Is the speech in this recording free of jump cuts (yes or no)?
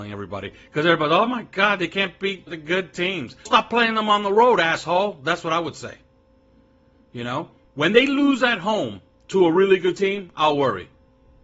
no